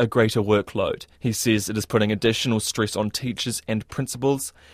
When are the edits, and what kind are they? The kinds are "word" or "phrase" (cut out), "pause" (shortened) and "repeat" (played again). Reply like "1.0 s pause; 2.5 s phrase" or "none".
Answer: 1.1 s pause